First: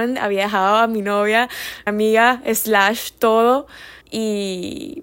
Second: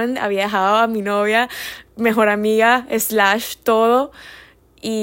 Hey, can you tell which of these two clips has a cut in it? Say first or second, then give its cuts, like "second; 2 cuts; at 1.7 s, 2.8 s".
first; 2 cuts; at 1.9 s, 4.0 s